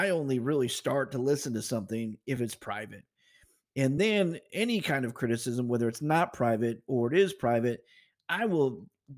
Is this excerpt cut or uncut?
uncut